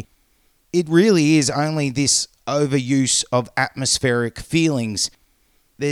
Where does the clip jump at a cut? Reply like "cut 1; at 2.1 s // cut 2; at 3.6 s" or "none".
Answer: none